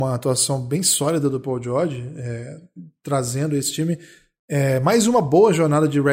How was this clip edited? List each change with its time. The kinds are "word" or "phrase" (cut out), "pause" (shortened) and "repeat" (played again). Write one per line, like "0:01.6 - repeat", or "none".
none